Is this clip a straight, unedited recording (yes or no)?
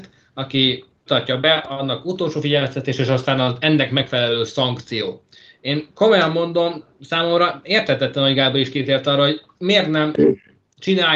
no